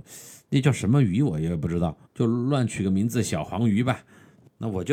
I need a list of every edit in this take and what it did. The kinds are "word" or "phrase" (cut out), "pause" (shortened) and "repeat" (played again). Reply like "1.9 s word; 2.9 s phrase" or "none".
2.1 s pause